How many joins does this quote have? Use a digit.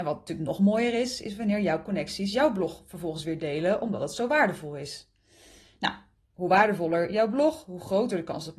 0